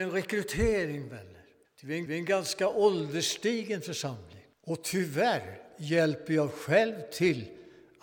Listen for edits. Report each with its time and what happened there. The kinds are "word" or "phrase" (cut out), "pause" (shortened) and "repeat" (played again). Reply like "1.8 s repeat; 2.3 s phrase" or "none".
1.7 s pause; 2.1 s repeat; 4.5 s pause